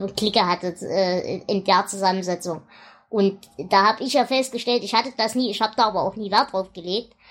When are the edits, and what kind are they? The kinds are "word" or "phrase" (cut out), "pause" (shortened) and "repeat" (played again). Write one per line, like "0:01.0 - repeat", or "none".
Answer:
none